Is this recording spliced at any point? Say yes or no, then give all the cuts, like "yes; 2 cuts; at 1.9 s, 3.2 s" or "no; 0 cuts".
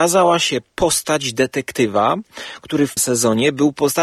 yes; 1 cut; at 3.0 s